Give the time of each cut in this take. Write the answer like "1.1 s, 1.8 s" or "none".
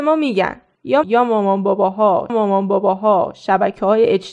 1.0 s, 2.3 s

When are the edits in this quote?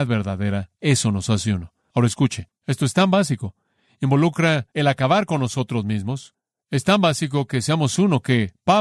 2.5 s, 4.7 s

